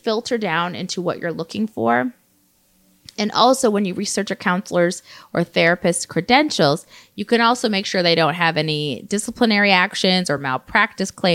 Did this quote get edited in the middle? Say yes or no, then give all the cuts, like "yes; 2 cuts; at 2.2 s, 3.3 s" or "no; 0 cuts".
no; 0 cuts